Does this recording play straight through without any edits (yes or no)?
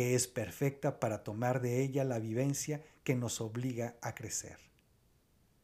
yes